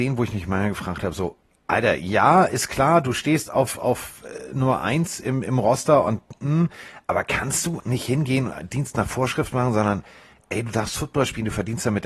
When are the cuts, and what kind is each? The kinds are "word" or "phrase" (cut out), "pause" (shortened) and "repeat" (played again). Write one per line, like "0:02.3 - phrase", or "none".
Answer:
0:07.8 - word